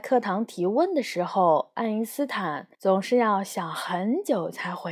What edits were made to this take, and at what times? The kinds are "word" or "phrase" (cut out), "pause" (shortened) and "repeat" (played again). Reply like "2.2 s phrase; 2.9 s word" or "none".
2.7 s pause